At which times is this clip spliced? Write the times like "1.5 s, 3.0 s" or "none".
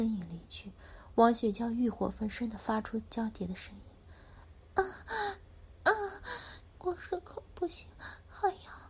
6.8 s